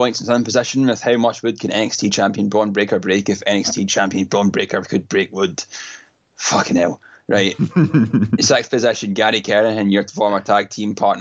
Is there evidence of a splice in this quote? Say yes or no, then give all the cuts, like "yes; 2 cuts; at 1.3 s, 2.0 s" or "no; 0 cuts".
no; 0 cuts